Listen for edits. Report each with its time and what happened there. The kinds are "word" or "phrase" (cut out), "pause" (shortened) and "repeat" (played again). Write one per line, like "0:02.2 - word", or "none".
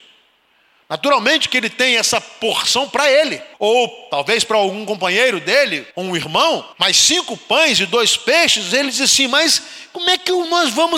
0:03.5 - pause
0:05.9 - pause
0:06.7 - pause